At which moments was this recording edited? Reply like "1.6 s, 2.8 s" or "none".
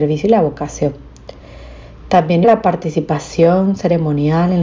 2.4 s